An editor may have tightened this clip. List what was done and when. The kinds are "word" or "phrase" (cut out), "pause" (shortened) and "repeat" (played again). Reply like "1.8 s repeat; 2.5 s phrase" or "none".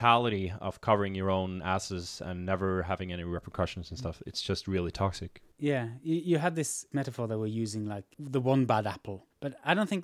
none